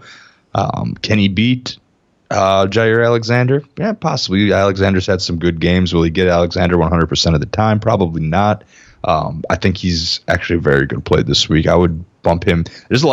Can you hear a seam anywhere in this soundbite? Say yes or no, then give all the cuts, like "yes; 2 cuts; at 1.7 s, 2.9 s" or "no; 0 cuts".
no; 0 cuts